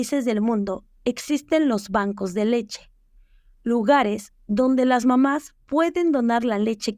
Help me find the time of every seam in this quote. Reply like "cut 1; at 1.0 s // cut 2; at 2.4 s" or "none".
none